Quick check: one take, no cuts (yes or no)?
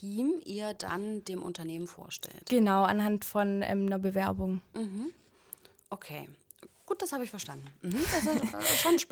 yes